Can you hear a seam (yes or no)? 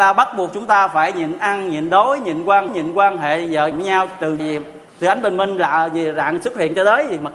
yes